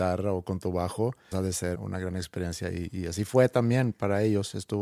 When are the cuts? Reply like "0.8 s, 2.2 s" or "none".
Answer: 1.3 s, 1.7 s